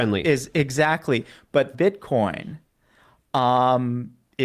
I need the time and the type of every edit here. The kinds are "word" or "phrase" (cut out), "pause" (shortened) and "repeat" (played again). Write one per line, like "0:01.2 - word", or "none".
0:01.7 - phrase